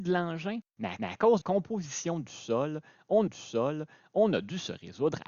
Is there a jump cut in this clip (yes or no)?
yes